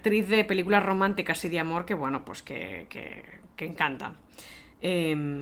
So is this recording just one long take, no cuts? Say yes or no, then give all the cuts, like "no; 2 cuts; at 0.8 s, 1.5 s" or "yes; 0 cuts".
yes; 0 cuts